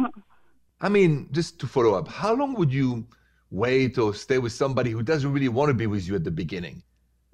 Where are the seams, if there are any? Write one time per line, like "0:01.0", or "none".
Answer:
none